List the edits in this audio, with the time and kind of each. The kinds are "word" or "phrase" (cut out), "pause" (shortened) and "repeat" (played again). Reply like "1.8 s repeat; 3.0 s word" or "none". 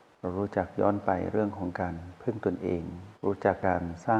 3.1 s pause